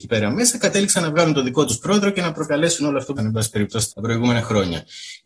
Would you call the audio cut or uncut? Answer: cut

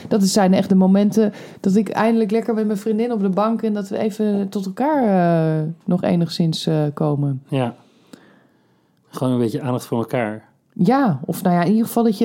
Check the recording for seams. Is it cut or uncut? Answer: uncut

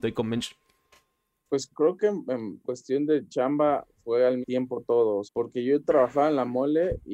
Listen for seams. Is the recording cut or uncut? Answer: cut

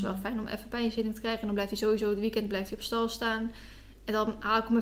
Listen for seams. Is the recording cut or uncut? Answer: uncut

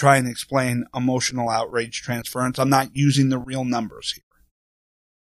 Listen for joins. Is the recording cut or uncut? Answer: uncut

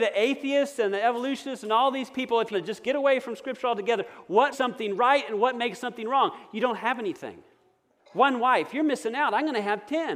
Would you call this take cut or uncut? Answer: cut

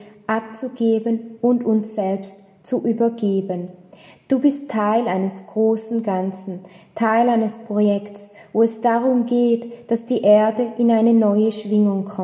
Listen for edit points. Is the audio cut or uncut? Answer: uncut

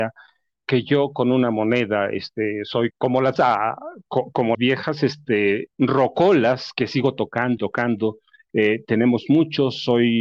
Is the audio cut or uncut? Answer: cut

